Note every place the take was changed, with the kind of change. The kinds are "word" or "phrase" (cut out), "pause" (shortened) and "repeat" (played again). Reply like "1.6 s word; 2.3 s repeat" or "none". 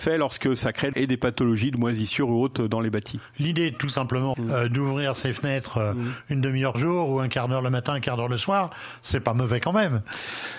0.9 s word; 4.3 s word; 6.7 s word